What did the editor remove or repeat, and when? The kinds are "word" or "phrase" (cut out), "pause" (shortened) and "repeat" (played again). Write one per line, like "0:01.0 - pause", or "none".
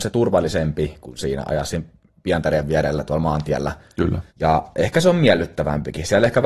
0:04.3 - pause